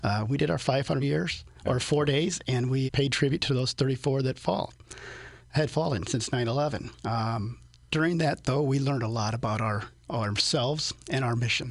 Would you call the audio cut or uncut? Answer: cut